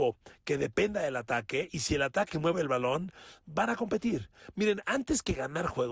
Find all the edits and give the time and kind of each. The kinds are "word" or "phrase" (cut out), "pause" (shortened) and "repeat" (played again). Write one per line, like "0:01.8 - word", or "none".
none